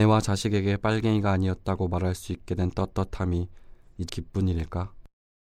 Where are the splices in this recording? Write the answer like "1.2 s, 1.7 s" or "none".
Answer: 4.1 s